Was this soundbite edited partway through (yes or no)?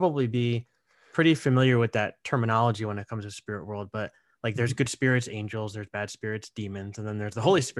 no